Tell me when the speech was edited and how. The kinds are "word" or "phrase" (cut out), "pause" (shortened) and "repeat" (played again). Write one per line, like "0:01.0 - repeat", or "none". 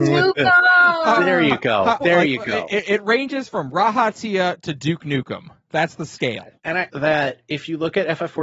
0:02.0 - word
0:06.6 - pause
0:06.9 - phrase